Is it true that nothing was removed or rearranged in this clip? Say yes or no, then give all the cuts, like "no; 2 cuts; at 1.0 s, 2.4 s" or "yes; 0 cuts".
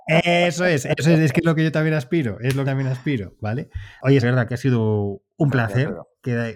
no; 2 cuts; at 2.6 s, 4.2 s